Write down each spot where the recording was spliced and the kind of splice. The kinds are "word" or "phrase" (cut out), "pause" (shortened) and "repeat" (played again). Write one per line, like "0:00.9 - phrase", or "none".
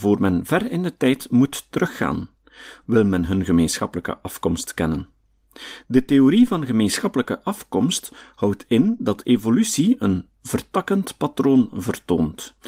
none